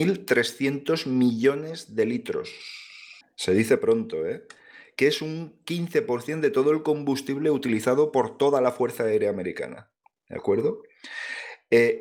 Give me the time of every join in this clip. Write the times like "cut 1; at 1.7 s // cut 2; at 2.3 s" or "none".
cut 1; at 3.2 s // cut 2; at 10.0 s